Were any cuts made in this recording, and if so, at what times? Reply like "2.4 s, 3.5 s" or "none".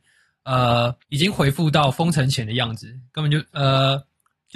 1.0 s